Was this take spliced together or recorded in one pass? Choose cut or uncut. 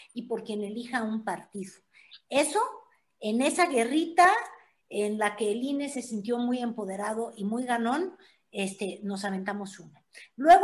uncut